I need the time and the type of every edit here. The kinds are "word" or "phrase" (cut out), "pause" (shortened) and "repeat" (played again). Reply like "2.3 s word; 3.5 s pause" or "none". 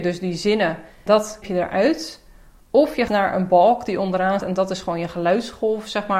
1.1 s word; 1.4 s word; 3.1 s word; 4.4 s word